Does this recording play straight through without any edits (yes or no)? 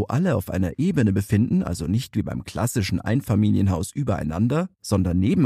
yes